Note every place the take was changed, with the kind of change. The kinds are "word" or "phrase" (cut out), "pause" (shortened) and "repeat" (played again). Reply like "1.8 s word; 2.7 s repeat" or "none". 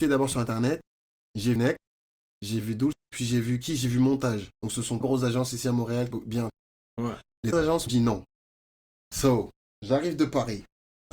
1.6 s word; 2.9 s word; 4.5 s pause; 5.0 s word; 6.1 s phrase; 7.5 s word; 7.9 s word